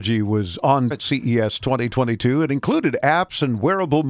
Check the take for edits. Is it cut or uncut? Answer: cut